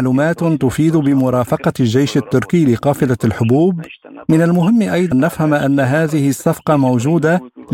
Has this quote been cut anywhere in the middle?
yes; 1 cut; at 5.1 s

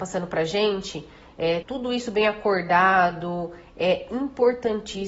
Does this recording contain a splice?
yes; 1 cut; at 1.6 s

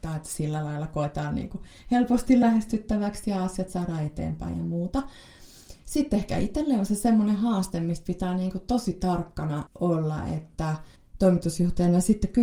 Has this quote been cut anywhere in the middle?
no; 0 cuts

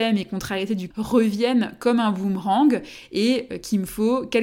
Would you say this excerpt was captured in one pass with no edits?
no; 1 cut; at 0.9 s

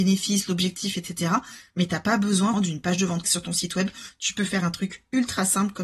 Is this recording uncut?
no; 2 cuts; at 2.5 s, 3.2 s

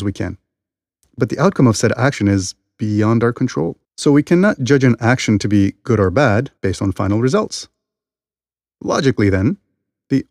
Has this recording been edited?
yes; 2 cuts; at 3.8 s, 6.6 s

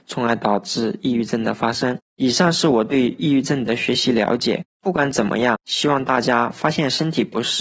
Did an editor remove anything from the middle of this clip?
yes; 1 cut; at 2.1 s

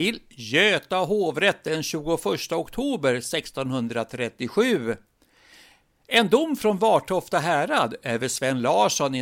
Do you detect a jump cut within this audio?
no; 0 cuts

